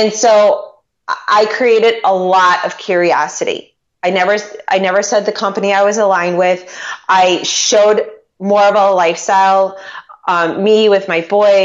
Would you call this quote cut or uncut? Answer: uncut